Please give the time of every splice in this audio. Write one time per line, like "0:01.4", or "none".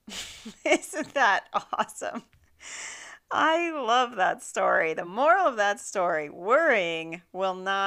none